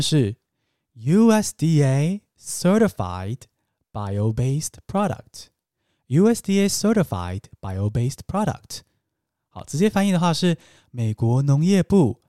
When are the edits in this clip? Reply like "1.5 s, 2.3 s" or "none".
none